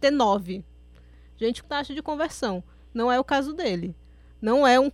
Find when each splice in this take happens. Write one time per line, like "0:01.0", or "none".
0:01.6